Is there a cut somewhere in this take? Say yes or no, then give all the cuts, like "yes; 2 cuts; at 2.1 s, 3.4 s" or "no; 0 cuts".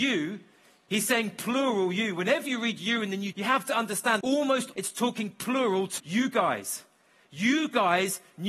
yes; 4 cuts; at 3.3 s, 4.2 s, 4.7 s, 6.0 s